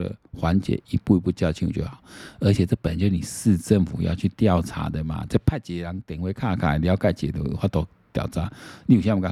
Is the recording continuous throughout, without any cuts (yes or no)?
yes